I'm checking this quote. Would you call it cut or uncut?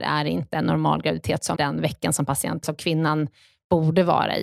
cut